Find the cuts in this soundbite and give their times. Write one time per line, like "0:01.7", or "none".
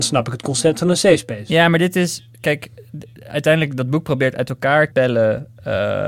0:04.9